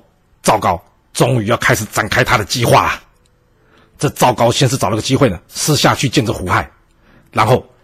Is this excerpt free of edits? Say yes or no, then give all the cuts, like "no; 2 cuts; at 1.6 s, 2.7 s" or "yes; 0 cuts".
yes; 0 cuts